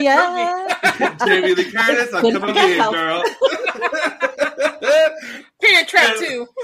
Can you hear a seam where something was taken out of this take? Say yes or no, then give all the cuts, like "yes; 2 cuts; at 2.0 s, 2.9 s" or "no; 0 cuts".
yes; 1 cut; at 2.5 s